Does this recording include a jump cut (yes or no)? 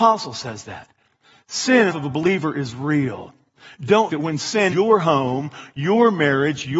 yes